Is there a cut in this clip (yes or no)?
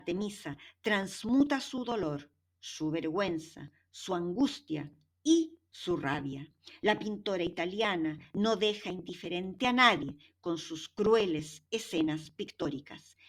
no